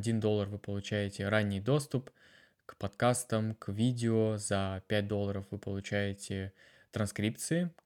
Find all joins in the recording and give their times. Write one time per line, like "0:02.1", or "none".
none